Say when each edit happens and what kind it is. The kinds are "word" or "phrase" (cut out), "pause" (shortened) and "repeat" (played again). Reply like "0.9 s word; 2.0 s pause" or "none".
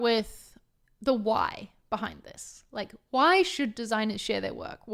none